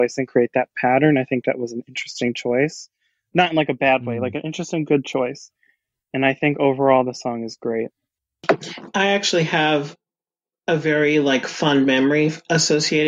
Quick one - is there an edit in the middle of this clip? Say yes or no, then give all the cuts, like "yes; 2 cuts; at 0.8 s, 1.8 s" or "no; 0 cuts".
no; 0 cuts